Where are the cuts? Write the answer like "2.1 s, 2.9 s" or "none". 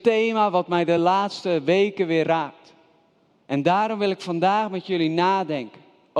none